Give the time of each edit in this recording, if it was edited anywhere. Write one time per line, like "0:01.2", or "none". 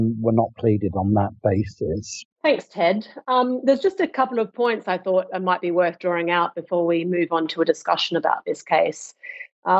0:02.3

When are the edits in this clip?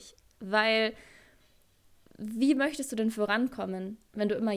none

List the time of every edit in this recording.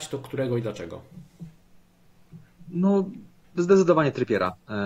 none

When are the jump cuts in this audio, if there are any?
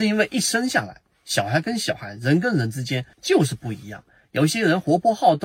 0:03.1

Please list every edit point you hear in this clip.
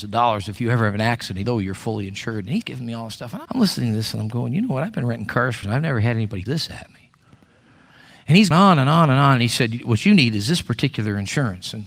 0:01.4
0:02.6
0:03.5
0:05.6
0:06.5
0:08.5

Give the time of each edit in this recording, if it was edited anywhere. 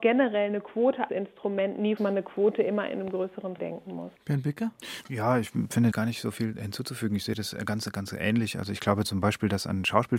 0:01.1
0:02.0
0:03.6
0:04.2
0:05.9

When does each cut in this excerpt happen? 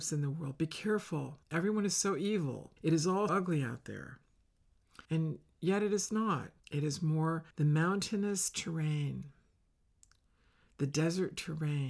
0:01.4
0:02.8
0:03.3
0:05.0
0:06.6
0:07.5

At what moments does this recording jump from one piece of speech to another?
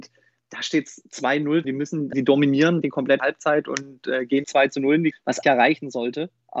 0:01.6
0:02.1
0:02.8
0:03.2
0:04.4
0:05.1
0:05.4

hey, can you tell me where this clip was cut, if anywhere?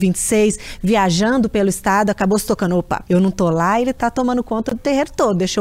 0:03.0

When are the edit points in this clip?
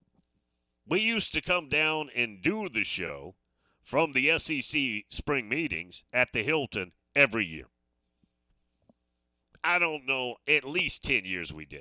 none

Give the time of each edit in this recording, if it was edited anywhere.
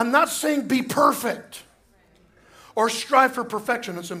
none

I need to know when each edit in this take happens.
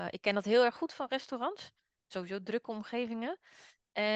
0:02.1

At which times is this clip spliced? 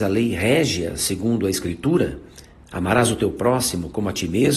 0:02.5

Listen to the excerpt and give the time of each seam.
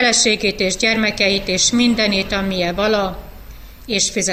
none

